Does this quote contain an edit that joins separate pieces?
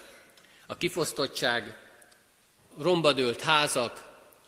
yes; 1 cut; at 2.7 s

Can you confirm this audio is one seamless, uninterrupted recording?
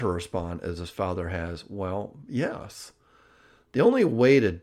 yes; 0 cuts

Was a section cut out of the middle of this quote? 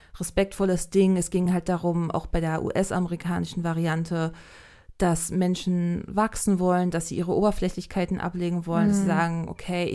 no; 0 cuts

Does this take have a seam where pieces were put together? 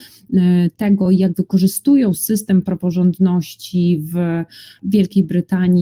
no; 0 cuts

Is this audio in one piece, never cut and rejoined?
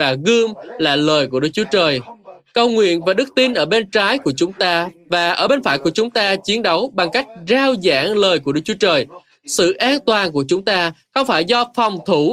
yes; 0 cuts

